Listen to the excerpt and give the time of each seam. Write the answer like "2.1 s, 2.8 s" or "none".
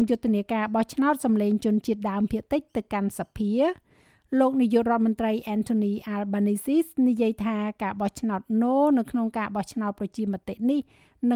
none